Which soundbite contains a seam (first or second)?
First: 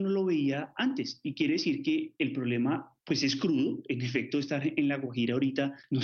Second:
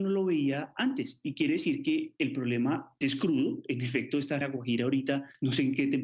second